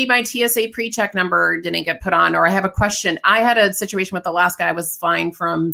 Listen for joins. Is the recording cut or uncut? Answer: uncut